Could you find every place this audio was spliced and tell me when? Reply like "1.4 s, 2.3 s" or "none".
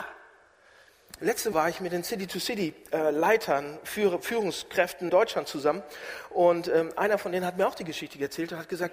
1.5 s, 5.1 s